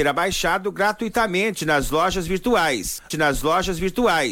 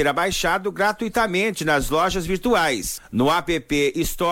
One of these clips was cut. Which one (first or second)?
first